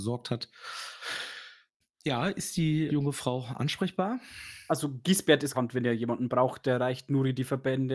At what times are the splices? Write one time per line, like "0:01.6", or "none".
0:02.9
0:05.5